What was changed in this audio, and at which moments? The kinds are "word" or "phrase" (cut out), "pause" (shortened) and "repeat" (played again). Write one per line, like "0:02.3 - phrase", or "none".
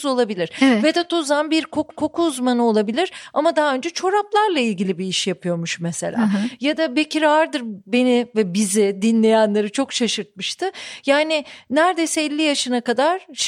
0:01.9 - repeat